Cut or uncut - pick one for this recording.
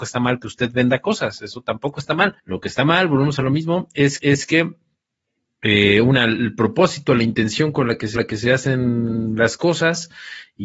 cut